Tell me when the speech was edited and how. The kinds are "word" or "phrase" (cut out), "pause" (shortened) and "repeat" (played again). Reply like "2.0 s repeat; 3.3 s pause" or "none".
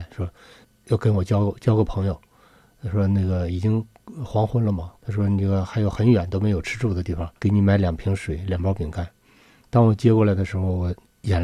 5.0 s pause; 7.4 s pause